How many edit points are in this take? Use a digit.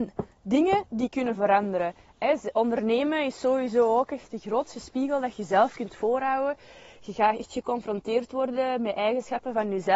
0